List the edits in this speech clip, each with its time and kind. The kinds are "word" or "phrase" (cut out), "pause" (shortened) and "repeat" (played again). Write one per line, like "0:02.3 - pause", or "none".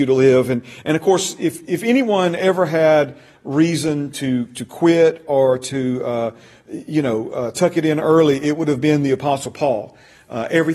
none